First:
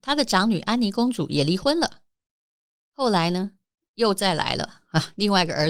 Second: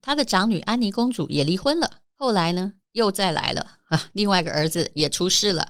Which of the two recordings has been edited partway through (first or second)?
second